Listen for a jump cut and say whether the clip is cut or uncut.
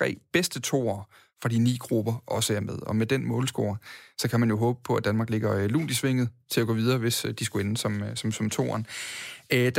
uncut